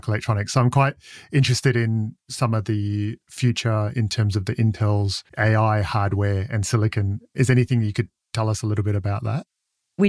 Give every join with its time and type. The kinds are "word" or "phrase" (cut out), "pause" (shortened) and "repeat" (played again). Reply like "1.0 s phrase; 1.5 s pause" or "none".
5.3 s pause